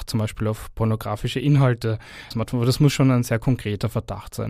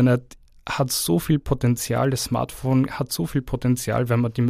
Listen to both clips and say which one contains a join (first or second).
first